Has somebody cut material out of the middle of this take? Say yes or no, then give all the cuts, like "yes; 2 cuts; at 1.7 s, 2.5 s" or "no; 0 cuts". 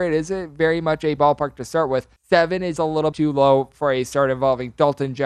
yes; 4 cuts; at 1.2 s, 2.2 s, 2.8 s, 3.1 s